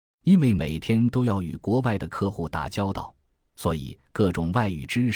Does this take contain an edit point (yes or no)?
no